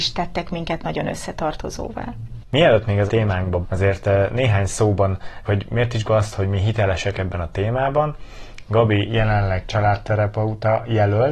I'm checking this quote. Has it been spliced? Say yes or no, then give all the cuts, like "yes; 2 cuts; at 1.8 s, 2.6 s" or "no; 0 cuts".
yes; 5 cuts; at 3.1 s, 3.6 s, 5.4 s, 6.0 s, 7.1 s